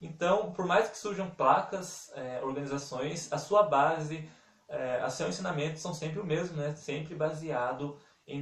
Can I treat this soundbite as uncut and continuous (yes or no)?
yes